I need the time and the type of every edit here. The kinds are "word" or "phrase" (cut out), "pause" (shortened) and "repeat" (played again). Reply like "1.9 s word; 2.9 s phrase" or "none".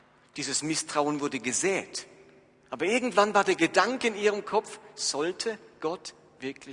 none